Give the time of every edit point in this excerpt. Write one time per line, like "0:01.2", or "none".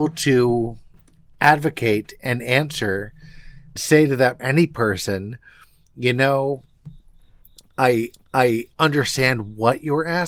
0:03.8
0:04.4
0:08.1